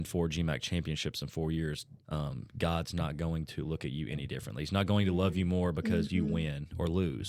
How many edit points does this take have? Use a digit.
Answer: 1